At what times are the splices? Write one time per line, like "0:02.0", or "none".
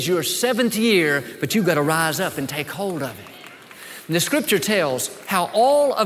none